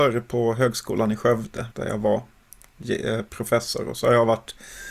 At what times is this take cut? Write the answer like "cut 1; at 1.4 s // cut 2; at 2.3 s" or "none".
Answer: cut 1; at 1.7 s